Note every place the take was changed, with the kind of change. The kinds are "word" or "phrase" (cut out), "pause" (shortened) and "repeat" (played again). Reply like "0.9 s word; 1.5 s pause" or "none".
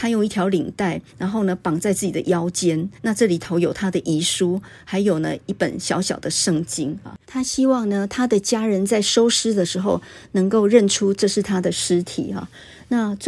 1.1 s pause; 3.0 s pause; 7.2 s pause